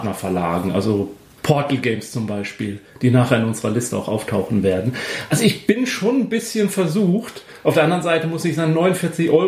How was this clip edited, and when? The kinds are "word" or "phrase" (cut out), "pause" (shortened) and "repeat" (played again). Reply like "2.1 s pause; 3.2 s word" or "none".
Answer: none